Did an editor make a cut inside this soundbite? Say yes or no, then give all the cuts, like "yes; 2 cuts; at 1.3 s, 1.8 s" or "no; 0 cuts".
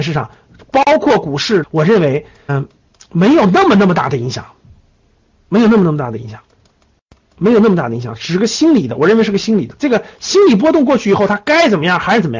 yes; 2 cuts; at 1.6 s, 2.5 s